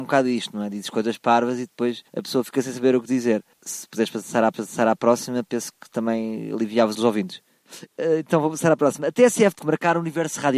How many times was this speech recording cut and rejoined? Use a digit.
5